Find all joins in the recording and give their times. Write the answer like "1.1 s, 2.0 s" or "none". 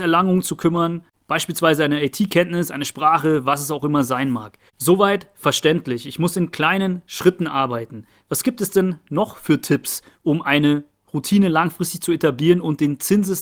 4.7 s